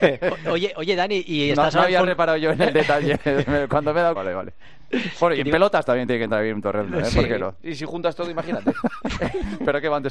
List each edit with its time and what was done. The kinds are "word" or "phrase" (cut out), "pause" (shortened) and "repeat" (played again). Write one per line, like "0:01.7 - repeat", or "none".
0:04.2 - phrase